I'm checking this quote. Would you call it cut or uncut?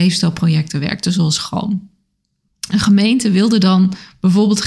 uncut